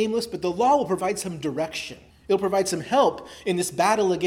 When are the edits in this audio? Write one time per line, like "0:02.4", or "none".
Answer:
0:02.1